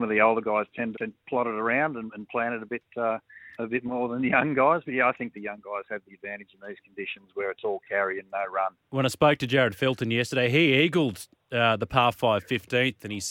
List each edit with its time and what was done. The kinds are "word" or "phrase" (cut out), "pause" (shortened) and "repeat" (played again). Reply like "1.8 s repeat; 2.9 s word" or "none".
0.9 s word; 3.5 s word; 8.8 s pause